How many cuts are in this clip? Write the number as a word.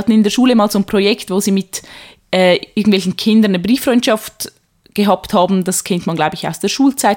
zero